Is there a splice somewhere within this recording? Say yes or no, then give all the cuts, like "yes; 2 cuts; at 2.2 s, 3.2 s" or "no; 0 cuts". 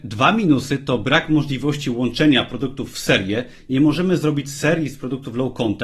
no; 0 cuts